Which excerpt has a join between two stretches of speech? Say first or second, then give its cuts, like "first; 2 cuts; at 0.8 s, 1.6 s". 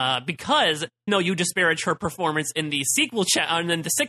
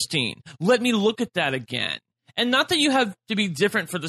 first; 1 cut; at 1.1 s